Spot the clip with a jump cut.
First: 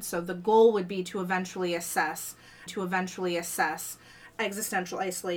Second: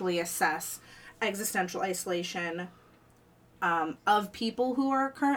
first; 1 cut; at 2.7 s

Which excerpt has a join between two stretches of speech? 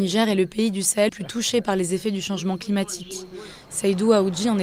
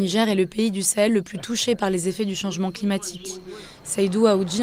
first; 1 cut; at 1.1 s

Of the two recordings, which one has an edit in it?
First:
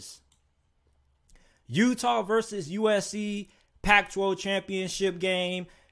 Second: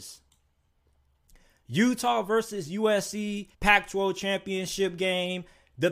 second; 1 cut; at 3.5 s

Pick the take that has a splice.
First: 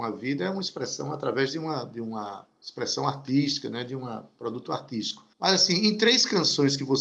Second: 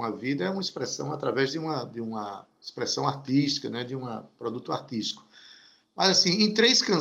first; 1 cut; at 5.3 s

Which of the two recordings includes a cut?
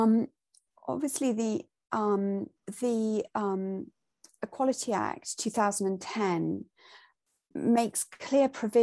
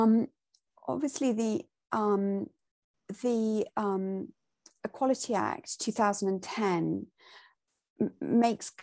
first; 2 cuts; at 2.6 s, 7.5 s

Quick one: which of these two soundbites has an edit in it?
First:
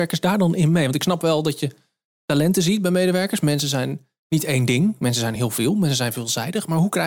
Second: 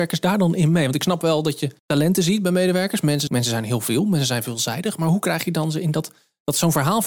second; 2 cuts; at 1.8 s, 3.3 s

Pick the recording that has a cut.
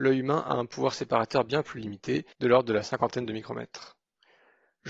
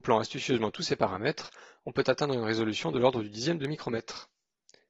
first; 1 cut; at 2.3 s

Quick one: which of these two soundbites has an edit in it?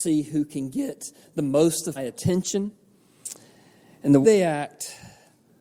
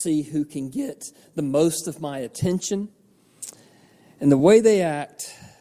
first; 2 cuts; at 2.0 s, 4.2 s

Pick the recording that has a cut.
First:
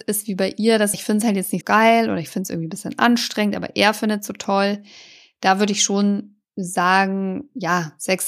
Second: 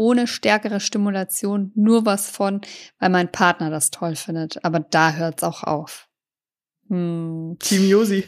first; 3 cuts; at 0.9 s, 1.6 s, 6.4 s

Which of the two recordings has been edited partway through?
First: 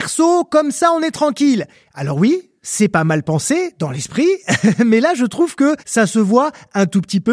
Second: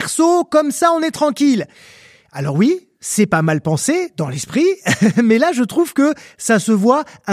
first; 2 cuts; at 1.7 s, 5.8 s

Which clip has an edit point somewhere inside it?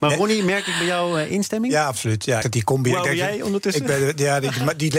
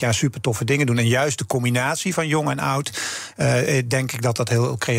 first; 1 cut; at 2.4 s

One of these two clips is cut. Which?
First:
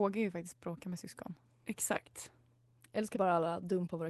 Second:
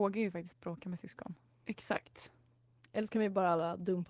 first; 1 cut; at 3.1 s

